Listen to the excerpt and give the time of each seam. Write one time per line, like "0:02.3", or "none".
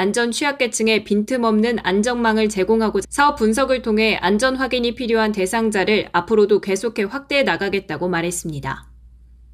0:03.0